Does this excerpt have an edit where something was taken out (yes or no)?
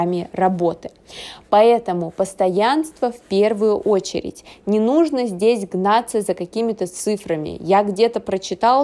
no